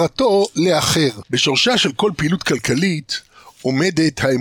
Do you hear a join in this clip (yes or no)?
no